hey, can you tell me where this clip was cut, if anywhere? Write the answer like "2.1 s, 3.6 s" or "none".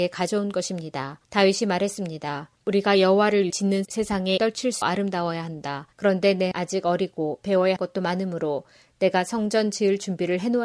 1.2 s, 2.6 s, 3.5 s, 3.8 s, 4.4 s, 4.8 s, 5.9 s, 6.5 s, 7.8 s